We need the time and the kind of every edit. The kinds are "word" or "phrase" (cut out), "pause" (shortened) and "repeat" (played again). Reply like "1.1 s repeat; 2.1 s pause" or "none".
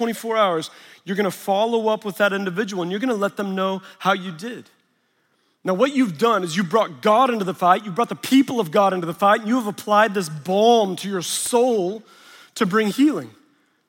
none